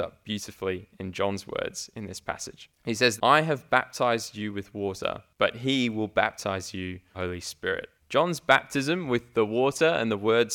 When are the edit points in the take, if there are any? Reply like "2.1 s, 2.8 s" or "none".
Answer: 2.7 s, 3.2 s, 5.3 s, 7.1 s, 8.0 s